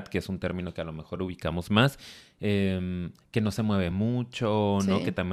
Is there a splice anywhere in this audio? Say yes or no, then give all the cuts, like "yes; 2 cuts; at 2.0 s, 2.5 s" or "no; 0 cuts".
no; 0 cuts